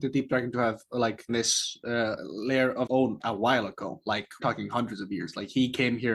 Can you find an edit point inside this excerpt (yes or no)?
yes